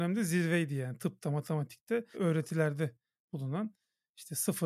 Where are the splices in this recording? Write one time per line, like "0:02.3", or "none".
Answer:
0:02.1